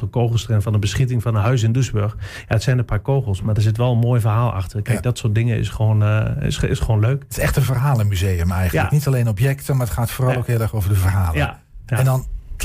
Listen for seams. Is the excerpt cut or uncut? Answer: uncut